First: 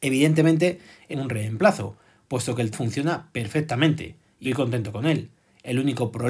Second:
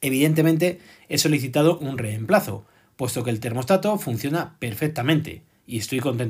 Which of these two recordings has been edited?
first; 3 cuts; at 1.1 s, 2.7 s, 4.4 s

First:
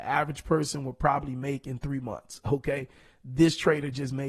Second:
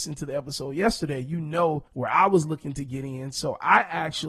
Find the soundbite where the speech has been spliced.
second; 1 cut; at 1.9 s

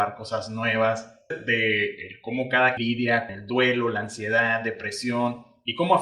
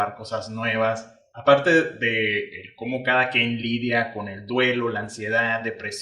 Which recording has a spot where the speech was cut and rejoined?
first; 3 cuts; at 1.3 s, 2.8 s, 3.3 s

